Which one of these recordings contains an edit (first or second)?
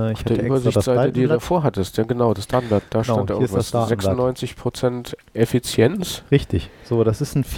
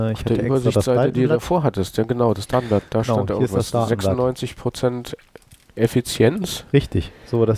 first